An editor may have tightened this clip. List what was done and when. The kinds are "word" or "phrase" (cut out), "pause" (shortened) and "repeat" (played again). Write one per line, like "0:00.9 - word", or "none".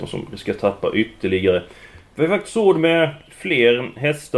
none